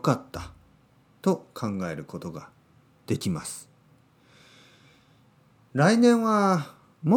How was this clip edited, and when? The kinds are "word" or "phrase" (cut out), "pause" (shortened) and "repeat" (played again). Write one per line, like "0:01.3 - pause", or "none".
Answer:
none

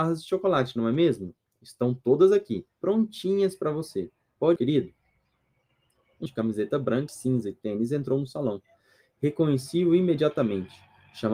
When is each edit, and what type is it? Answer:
0:02.7 - pause
0:04.6 - phrase
0:06.3 - word
0:07.1 - word

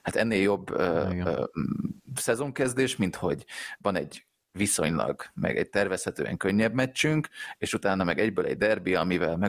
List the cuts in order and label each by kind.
none

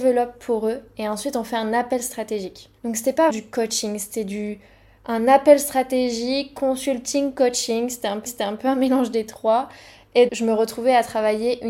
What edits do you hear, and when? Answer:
0:02.8 - pause
0:03.3 - word
0:08.3 - repeat
0:10.3 - word

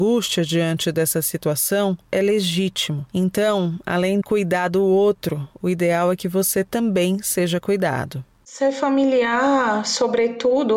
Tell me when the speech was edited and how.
0:03.1 - pause
0:04.2 - word

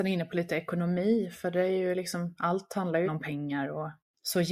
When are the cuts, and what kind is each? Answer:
0:03.0 - word

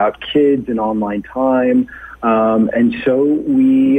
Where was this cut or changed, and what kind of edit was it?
none

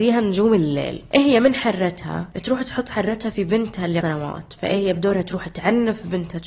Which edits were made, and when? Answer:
0:04.0 - phrase

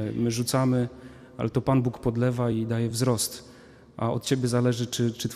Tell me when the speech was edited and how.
none

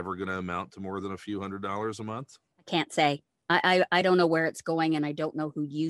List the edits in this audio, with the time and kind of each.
0:02.5 - pause

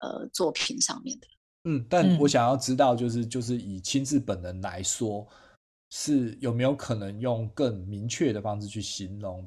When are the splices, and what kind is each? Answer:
none

